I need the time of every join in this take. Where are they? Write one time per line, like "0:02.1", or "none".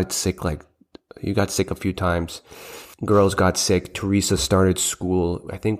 0:02.9